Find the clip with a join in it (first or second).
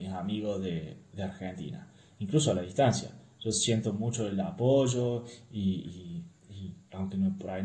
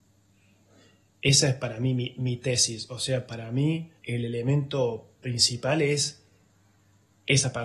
second